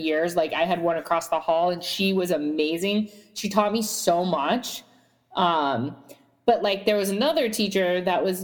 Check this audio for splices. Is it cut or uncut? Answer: uncut